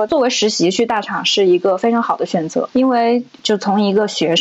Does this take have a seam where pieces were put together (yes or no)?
yes